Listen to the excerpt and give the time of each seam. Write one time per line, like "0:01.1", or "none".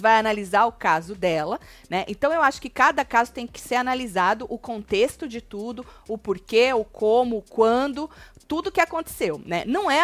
none